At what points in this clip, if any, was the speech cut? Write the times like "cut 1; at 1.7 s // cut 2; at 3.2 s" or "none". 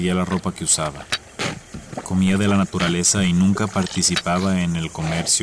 none